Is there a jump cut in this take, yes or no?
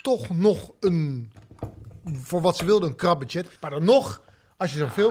yes